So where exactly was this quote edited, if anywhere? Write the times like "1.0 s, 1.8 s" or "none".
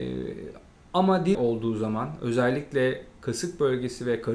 1.3 s